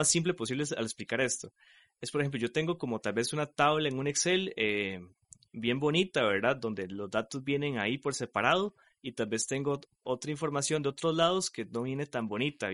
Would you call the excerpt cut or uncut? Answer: uncut